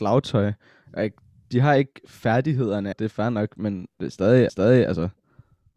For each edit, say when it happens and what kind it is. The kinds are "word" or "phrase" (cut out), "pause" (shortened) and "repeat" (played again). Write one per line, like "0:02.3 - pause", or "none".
0:02.9 - phrase
0:04.5 - repeat